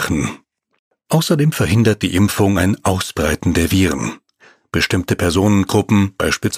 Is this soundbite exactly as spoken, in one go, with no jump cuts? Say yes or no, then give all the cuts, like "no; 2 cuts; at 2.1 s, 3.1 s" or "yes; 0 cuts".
yes; 0 cuts